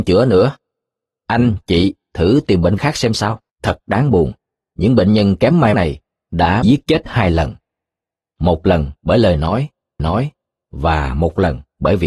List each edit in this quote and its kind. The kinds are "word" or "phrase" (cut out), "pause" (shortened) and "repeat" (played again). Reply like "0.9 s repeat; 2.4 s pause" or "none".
2.8 s word; 3.5 s pause; 5.7 s word; 6.6 s word; 10.0 s repeat